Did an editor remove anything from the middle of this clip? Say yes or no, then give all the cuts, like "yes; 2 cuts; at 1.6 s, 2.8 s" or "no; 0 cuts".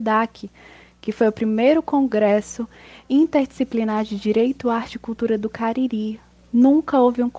no; 0 cuts